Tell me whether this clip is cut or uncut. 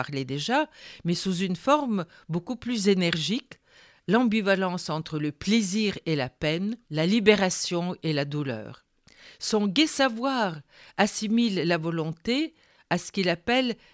cut